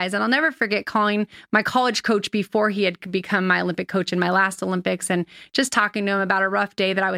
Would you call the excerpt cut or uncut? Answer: uncut